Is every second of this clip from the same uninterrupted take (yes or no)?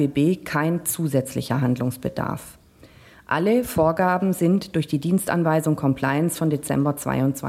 yes